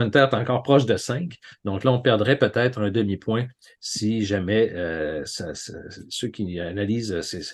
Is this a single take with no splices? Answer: yes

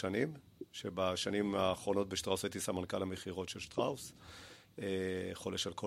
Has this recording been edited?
no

